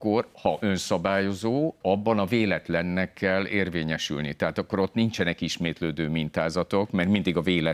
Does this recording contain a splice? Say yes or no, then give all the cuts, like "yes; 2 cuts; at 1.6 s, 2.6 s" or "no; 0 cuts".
yes; 1 cut; at 1.8 s